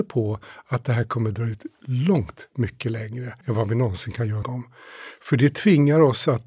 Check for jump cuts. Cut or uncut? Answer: cut